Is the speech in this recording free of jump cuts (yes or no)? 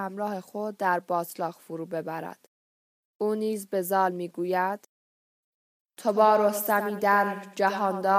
yes